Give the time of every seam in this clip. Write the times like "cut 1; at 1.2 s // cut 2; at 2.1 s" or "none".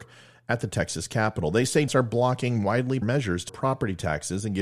cut 1; at 1.9 s // cut 2; at 3.0 s // cut 3; at 3.5 s